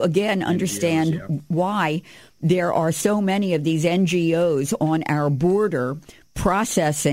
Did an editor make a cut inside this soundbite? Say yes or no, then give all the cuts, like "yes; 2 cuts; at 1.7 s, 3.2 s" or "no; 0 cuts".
no; 0 cuts